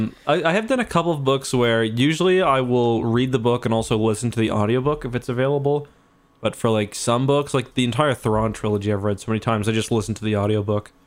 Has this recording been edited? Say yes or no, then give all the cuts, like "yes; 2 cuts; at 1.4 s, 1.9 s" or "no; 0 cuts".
no; 0 cuts